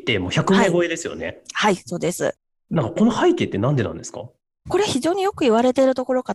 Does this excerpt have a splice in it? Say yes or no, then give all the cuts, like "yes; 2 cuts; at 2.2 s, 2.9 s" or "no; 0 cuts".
no; 0 cuts